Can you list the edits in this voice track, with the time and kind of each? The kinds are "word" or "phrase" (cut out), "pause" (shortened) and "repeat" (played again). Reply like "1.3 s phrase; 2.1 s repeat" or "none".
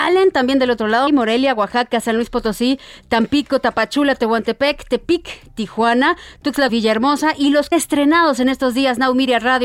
1.1 s word; 6.7 s word; 7.7 s phrase